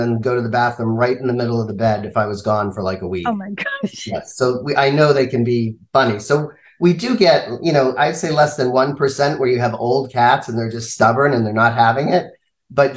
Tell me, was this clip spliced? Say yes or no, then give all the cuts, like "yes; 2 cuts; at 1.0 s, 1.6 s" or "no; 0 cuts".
no; 0 cuts